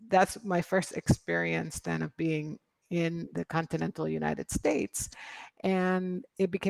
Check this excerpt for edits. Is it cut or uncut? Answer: uncut